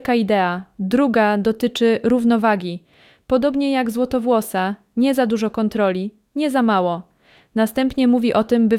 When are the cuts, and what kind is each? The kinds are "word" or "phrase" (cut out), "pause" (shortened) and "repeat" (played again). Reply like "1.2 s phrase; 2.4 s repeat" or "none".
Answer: none